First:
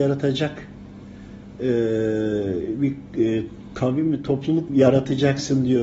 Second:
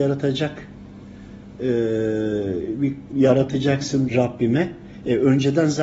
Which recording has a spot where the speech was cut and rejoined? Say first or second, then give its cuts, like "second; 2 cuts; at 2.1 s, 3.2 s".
second; 2 cuts; at 3.1 s, 4.1 s